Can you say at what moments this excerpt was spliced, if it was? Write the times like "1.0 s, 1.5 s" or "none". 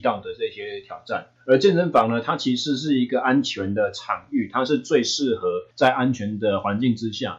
1.4 s, 5.7 s